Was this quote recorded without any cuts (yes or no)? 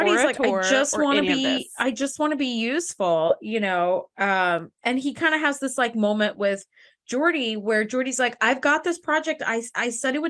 yes